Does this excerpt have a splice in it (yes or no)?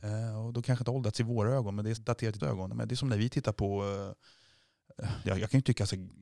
yes